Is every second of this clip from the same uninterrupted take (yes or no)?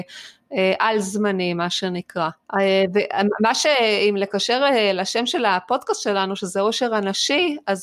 yes